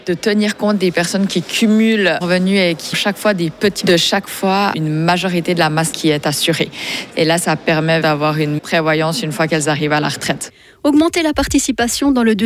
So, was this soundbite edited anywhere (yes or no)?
yes